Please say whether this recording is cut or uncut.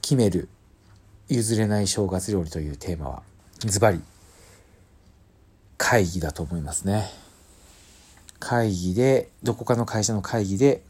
cut